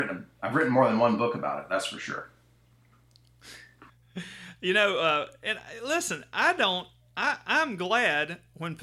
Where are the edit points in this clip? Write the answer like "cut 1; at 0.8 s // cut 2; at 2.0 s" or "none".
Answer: none